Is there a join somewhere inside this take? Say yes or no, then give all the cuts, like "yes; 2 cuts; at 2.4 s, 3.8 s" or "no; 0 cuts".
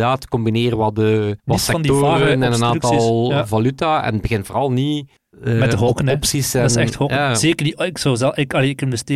yes; 2 cuts; at 1.4 s, 5.2 s